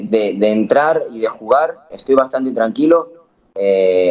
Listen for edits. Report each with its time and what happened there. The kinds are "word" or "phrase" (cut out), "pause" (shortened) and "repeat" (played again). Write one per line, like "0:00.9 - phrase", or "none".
0:01.9 - word

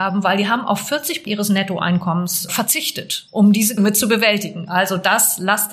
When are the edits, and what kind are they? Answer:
0:01.3 - word
0:02.5 - word
0:03.8 - word

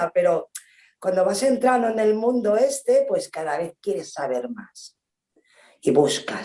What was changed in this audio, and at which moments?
none

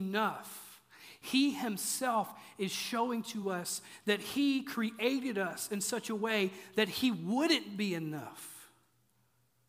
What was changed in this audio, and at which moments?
none

